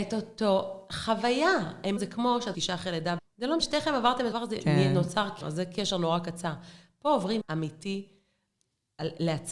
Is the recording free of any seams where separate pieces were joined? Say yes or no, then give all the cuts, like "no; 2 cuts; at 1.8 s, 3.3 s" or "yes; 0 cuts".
no; 7 cuts; at 2.0 s, 2.5 s, 3.2 s, 3.6 s, 4.3 s, 5.4 s, 7.4 s